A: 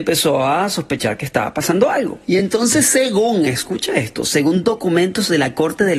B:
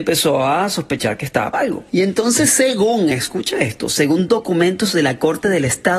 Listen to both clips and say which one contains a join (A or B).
B